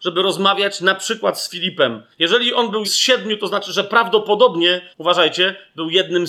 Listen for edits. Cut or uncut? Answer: cut